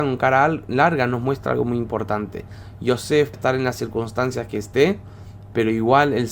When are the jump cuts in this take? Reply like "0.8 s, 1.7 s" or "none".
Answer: 3.3 s